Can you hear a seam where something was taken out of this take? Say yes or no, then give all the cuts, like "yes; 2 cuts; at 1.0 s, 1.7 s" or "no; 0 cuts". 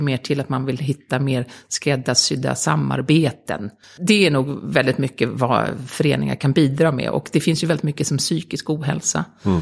yes; 1 cut; at 3.8 s